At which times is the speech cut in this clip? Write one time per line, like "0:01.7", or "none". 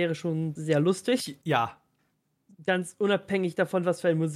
none